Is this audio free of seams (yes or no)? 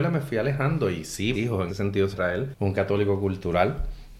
no